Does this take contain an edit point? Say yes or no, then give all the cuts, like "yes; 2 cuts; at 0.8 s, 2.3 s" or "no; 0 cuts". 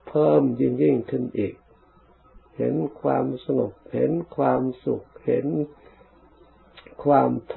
yes; 1 cut; at 2.5 s